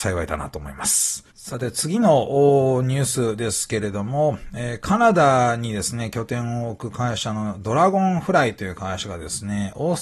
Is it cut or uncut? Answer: cut